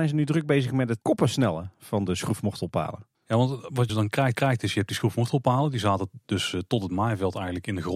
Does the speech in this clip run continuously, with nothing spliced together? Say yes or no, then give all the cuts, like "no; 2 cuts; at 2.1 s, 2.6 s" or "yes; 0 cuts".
no; 4 cuts; at 1.0 s, 3.1 s, 3.9 s, 4.3 s